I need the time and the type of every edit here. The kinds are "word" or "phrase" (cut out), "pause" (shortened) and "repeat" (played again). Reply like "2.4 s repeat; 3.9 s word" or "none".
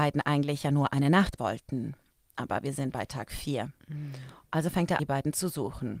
1.4 s word; 2.9 s word; 5.0 s word